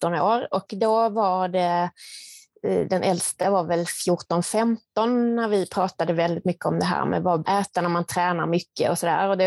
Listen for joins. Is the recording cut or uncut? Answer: cut